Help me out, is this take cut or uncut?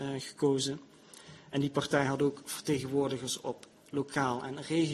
uncut